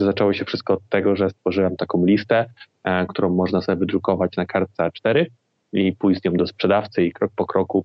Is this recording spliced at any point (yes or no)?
no